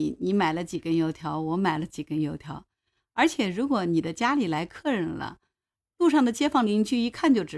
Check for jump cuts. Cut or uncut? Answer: uncut